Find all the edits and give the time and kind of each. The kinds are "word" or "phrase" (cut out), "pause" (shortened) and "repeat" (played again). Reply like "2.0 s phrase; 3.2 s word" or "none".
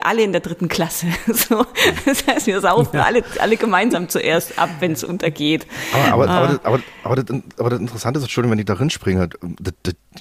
none